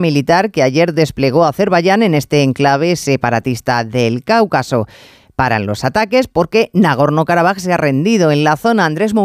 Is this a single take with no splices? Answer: yes; 0 cuts

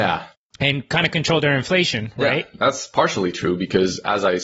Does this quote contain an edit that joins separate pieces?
no; 0 cuts

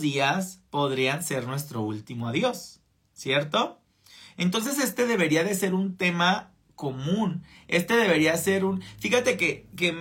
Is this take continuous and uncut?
yes; 0 cuts

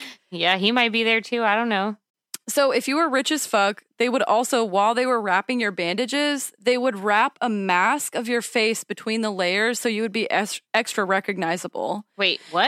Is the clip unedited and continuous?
yes; 0 cuts

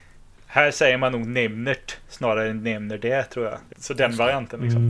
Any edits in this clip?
yes; 1 cut; at 3.7 s

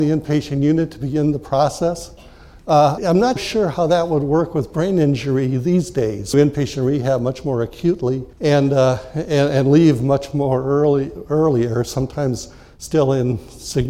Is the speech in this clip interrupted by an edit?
yes; 4 cuts; at 3.0 s, 3.4 s, 6.3 s, 8.3 s

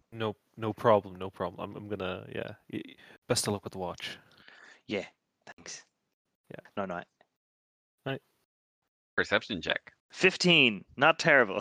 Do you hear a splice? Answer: yes; 1 cut; at 10.0 s

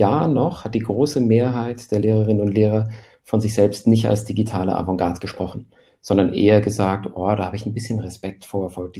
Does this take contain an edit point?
no; 0 cuts

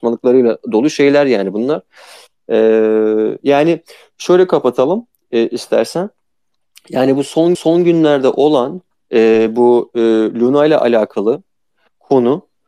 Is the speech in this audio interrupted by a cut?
yes; 1 cut; at 7.5 s

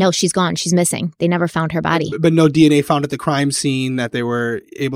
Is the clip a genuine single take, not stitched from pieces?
yes; 0 cuts

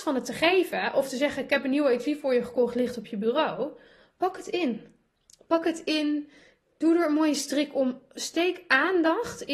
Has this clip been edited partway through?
no; 0 cuts

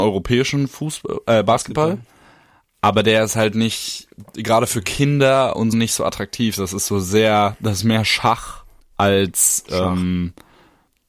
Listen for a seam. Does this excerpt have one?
yes; 2 cuts; at 5.7 s, 8.8 s

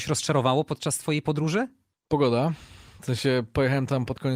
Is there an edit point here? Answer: no; 0 cuts

